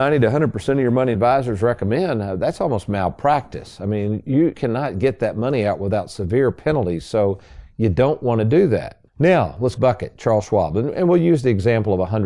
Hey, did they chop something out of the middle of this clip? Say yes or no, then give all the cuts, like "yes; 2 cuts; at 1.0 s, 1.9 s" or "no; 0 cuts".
yes; 4 cuts; at 1.1 s, 4.5 s, 9.1 s, 9.8 s